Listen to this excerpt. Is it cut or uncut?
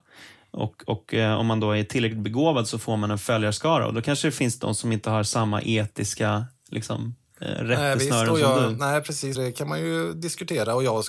cut